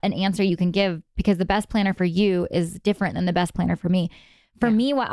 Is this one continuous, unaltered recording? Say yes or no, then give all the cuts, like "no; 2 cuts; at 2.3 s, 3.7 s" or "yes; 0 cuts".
yes; 0 cuts